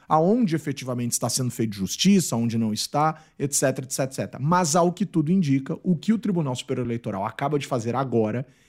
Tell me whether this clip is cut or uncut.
uncut